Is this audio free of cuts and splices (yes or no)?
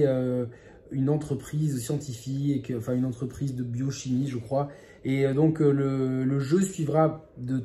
yes